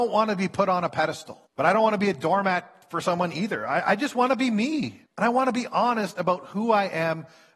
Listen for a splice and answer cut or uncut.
cut